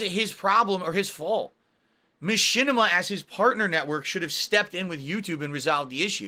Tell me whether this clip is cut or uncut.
uncut